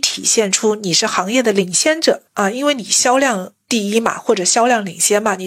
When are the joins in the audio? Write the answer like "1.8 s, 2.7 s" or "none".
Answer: 2.3 s